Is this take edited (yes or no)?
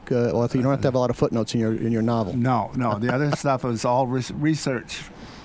no